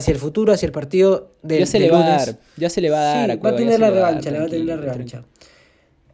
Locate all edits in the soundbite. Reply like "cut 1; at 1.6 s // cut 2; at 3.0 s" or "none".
none